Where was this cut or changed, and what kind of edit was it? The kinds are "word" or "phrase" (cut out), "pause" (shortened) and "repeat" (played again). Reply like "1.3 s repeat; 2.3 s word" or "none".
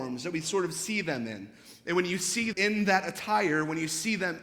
2.5 s word